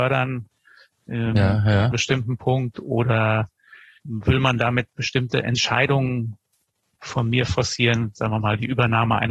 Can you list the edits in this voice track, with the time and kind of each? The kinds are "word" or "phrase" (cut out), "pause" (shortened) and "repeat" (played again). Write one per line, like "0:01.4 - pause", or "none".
0:01.9 - word
0:04.0 - word